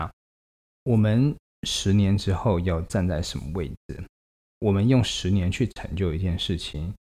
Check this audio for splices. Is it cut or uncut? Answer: uncut